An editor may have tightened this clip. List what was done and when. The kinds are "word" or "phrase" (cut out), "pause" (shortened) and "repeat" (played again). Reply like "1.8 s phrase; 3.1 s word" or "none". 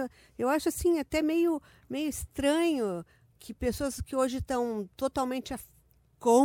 none